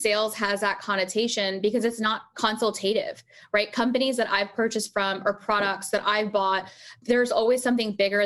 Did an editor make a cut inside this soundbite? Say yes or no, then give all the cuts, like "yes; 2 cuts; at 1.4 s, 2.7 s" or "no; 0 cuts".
no; 0 cuts